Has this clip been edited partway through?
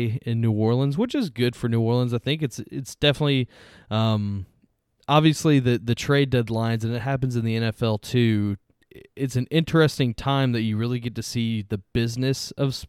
no; 0 cuts

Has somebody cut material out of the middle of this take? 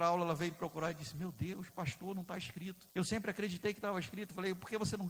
yes; 1 cut; at 2.9 s

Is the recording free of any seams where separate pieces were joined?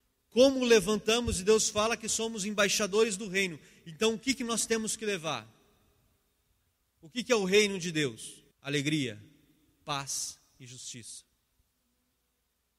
no; 1 cut; at 8.5 s

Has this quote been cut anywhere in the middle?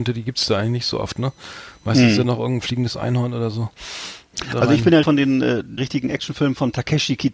yes; 2 cuts; at 5.0 s, 5.8 s

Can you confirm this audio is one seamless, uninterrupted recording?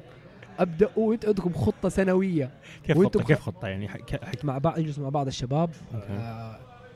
no; 1 cut; at 4.4 s

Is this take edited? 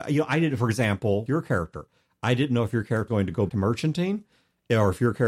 yes; 3 cuts; at 1.3 s, 3.1 s, 3.5 s

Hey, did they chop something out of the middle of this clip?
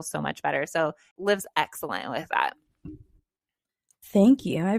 no; 0 cuts

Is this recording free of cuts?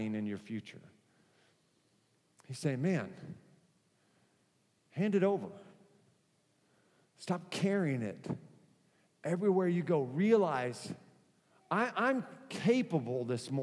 no; 1 cut; at 11.5 s

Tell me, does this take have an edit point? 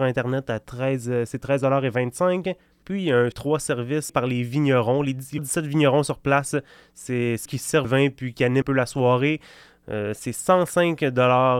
yes; 6 cuts; at 3.3 s, 4.1 s, 5.4 s, 7.5 s, 7.8 s, 8.6 s

